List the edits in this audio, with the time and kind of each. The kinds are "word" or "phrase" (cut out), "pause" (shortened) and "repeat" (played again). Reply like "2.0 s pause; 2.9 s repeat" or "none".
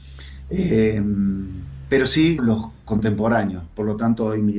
2.4 s word

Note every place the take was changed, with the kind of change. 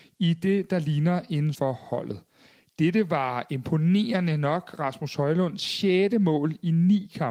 1.5 s word

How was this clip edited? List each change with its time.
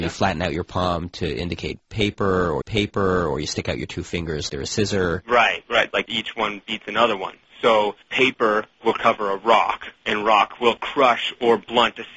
2.6 s repeat; 4.5 s word; 8.0 s pause; 10.0 s pause

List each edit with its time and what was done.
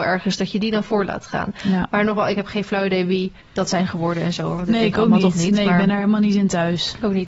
3.4 s pause

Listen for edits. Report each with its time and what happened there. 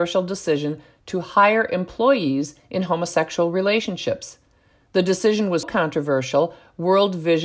5.6 s word

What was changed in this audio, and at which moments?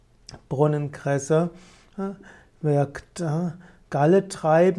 none

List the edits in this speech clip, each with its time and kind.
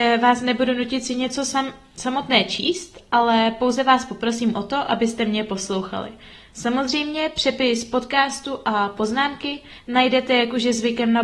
none

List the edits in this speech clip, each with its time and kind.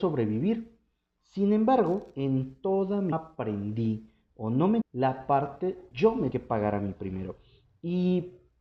3.1 s phrase; 4.8 s phrase; 5.9 s word; 6.3 s word

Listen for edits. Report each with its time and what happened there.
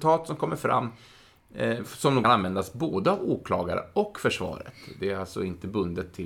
2.2 s phrase

